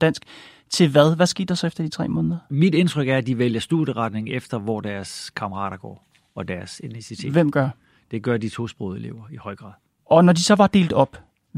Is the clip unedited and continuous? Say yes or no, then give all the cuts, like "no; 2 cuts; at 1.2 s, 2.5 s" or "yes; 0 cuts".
yes; 0 cuts